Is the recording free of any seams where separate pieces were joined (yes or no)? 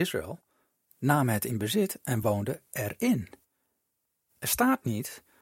yes